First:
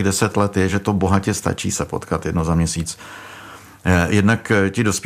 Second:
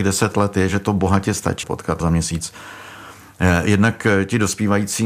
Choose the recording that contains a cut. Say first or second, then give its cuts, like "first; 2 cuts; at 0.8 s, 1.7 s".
second; 2 cuts; at 1.6 s, 2.0 s